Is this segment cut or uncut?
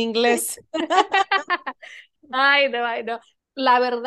uncut